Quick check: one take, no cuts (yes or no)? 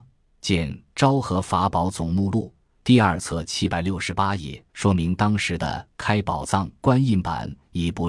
no